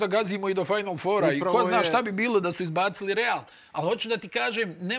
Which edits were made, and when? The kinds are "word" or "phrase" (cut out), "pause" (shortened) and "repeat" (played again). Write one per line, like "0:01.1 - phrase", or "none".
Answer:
none